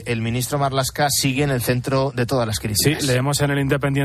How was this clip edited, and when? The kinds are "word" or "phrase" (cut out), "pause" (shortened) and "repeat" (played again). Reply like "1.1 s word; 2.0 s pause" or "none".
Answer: none